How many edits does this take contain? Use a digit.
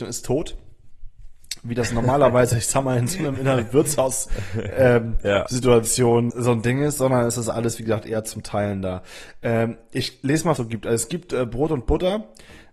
2